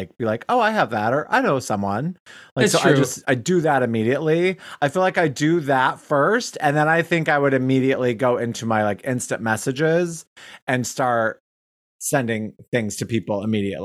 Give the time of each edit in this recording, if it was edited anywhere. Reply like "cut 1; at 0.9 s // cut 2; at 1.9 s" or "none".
none